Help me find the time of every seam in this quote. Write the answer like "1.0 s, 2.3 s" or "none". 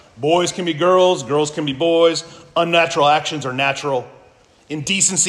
none

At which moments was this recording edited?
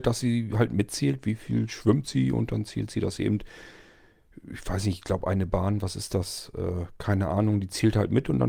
none

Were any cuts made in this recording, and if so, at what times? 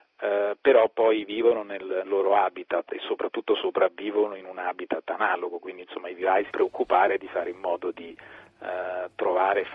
2.1 s, 6.5 s

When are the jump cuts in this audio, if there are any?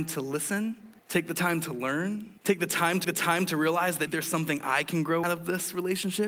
1.0 s, 2.4 s, 3.0 s, 4.1 s, 5.2 s

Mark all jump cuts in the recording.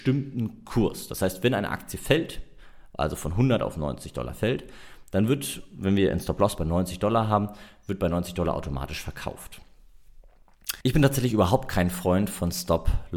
10.8 s

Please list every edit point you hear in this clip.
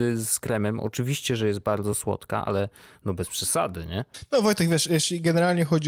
none

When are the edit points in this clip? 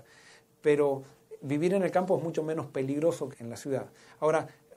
3.3 s

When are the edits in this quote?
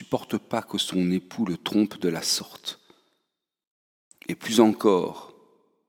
none

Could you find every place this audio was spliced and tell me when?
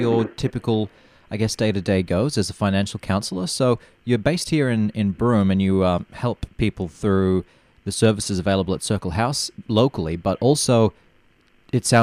none

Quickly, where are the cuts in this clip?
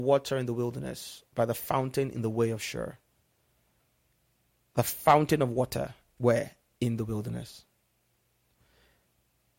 none

